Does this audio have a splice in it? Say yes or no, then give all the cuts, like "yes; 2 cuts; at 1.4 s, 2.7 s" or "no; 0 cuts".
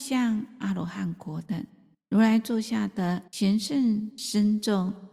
yes; 2 cuts; at 1.9 s, 3.3 s